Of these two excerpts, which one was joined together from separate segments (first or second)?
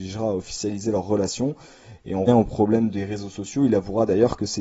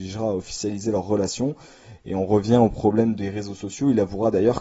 first